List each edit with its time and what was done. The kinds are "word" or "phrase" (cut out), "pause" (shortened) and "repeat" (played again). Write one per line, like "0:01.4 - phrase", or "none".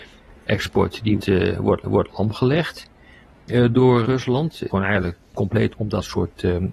0:01.2 - word
0:01.8 - repeat
0:04.0 - word
0:04.7 - word
0:05.7 - word